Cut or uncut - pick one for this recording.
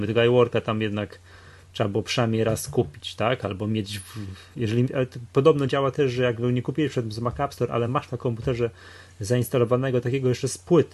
uncut